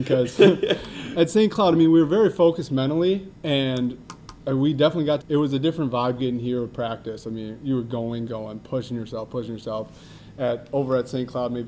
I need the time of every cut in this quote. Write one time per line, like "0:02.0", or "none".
0:03.4
0:05.2
0:08.3